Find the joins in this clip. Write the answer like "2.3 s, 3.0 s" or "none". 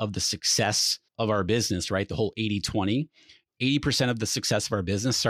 1.1 s